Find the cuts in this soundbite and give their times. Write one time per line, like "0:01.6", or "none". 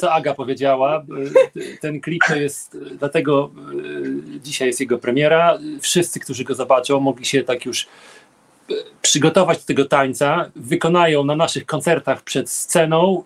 0:05.8
0:10.6